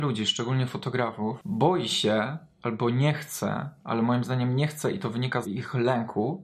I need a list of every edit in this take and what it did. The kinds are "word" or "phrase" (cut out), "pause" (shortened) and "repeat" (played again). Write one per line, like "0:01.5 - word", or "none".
0:05.4 - word